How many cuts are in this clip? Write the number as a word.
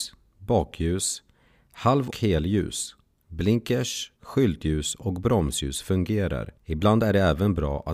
three